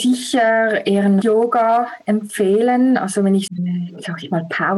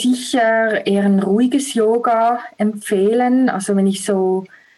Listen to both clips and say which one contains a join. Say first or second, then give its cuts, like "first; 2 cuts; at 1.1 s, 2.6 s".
first; 2 cuts; at 1.2 s, 3.5 s